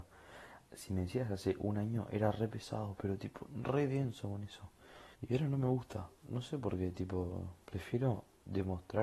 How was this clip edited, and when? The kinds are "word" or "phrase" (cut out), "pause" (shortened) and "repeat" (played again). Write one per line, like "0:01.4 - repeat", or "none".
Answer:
0:05.1 - pause
0:06.2 - pause
0:07.6 - pause